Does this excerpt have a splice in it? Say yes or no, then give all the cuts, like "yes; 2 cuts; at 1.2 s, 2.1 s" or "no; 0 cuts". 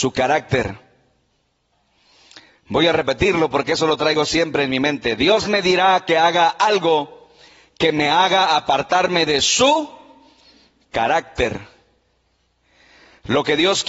yes; 1 cut; at 5.4 s